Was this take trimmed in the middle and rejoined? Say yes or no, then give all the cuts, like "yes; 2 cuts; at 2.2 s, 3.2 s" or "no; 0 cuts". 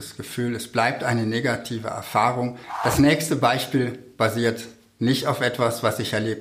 no; 0 cuts